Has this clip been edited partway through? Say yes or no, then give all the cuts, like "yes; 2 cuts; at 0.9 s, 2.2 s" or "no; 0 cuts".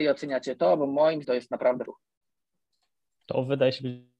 yes; 2 cuts; at 1.2 s, 1.9 s